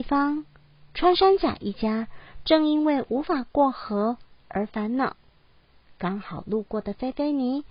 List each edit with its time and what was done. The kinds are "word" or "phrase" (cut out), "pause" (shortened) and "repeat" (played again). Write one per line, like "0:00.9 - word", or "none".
none

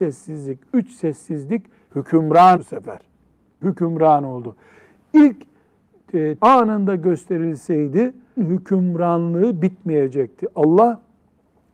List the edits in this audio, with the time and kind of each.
0:01.9 - word
0:02.6 - word
0:03.6 - word
0:06.4 - word
0:08.4 - word

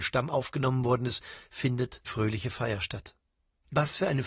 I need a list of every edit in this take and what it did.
0:02.0 - word

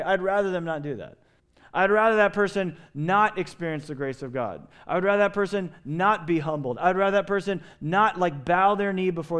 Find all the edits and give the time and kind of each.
0:01.4 - pause

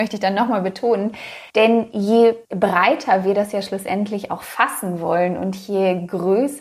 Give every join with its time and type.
0:01.5 - pause
0:02.4 - pause

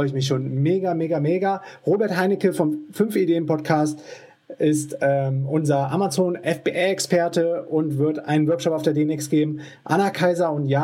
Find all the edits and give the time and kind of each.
none

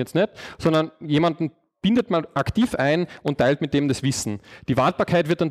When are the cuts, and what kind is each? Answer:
none

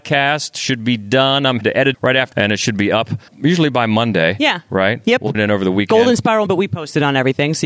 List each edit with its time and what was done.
0:01.6 - word
0:01.9 - word
0:02.3 - word
0:03.3 - word
0:05.3 - word
0:06.5 - word

